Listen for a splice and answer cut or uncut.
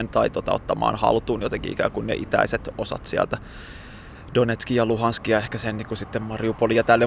uncut